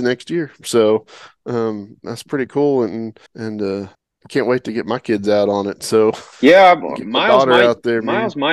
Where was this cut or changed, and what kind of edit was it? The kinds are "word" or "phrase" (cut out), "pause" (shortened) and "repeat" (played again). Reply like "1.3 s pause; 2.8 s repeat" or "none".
3.3 s pause; 3.9 s pause; 6.3 s pause